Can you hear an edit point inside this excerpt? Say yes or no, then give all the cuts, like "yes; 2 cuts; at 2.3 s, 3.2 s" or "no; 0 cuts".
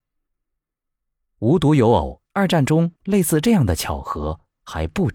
yes; 2 cuts; at 2.3 s, 3.0 s